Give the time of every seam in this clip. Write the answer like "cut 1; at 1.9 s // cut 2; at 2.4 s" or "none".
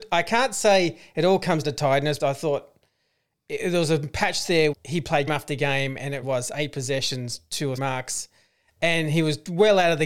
cut 1; at 1.6 s // cut 2; at 2.2 s // cut 3; at 4.7 s // cut 4; at 5.3 s // cut 5; at 6.2 s // cut 6; at 7.8 s

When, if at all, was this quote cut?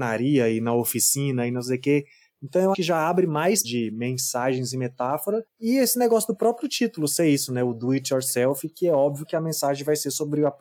cut 1; at 2.7 s // cut 2; at 3.6 s // cut 3; at 5.5 s

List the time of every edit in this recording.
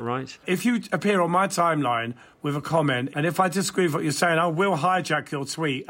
none

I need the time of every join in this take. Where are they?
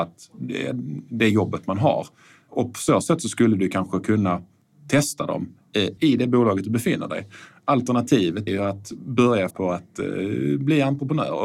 cut 1; at 6.0 s // cut 2; at 8.5 s // cut 3; at 9.5 s

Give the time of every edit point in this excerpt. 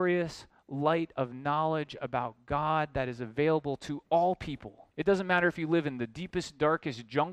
cut 1; at 4.9 s

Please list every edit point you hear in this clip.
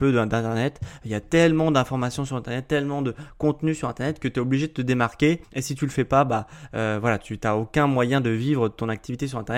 cut 1; at 5.4 s

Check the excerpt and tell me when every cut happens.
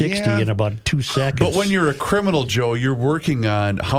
none

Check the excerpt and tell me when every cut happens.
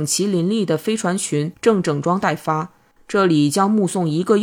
cut 1; at 2.9 s

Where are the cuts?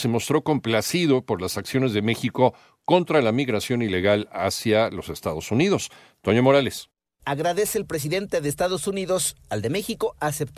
none

